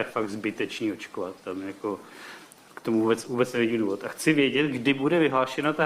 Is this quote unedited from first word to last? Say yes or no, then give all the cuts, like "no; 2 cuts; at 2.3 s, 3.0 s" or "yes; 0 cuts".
yes; 0 cuts